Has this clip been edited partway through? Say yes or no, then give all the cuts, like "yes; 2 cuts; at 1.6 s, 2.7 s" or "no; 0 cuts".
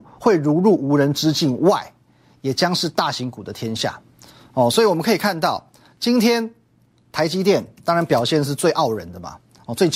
no; 0 cuts